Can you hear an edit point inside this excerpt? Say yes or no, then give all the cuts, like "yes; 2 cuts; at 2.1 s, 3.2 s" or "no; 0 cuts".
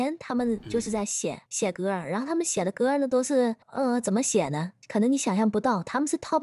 yes; 2 cuts; at 1.5 s, 3.6 s